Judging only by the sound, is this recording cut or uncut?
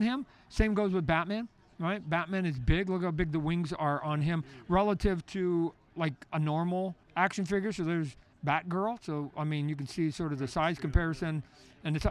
cut